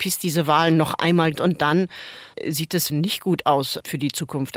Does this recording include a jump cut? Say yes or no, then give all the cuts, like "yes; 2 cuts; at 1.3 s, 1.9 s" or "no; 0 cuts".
yes; 2 cuts; at 1.3 s, 2.9 s